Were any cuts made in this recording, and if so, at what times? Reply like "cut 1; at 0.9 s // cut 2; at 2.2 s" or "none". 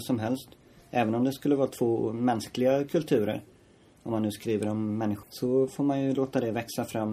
cut 1; at 5.2 s